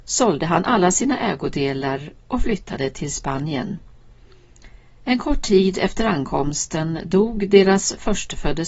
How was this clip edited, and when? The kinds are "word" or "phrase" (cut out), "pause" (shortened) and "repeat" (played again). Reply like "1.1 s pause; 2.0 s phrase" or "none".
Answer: none